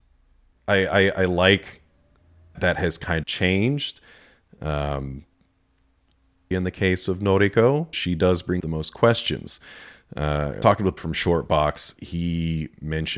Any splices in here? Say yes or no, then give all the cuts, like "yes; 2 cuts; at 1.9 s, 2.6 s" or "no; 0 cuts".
yes; 8 cuts; at 2.5 s, 3.2 s, 6.5 s, 7.9 s, 8.6 s, 10.6 s, 11.0 s, 12.0 s